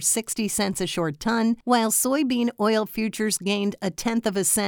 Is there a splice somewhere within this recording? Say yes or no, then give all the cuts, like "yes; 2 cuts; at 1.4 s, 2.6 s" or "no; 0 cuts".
yes; 1 cut; at 1.6 s